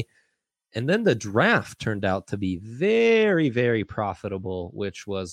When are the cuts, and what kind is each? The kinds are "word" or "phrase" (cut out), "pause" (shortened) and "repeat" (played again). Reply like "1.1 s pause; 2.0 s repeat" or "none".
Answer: none